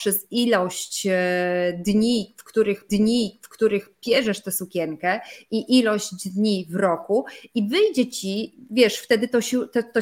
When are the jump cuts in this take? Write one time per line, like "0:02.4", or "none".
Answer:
0:02.9